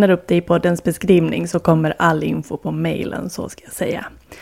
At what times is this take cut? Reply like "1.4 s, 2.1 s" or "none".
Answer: none